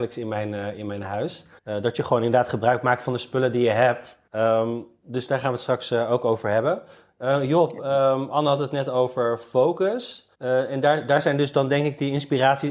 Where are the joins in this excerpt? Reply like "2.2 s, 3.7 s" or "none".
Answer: 1.6 s, 4.3 s, 10.3 s